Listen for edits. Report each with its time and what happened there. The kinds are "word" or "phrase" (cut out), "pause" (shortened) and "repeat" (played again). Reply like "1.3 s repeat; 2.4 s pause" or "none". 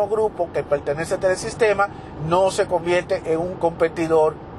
2.2 s word; 3.6 s word